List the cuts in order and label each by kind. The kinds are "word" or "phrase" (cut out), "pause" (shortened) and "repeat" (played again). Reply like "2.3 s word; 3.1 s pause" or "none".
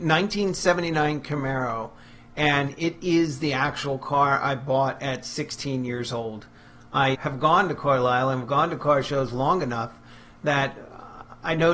7.1 s word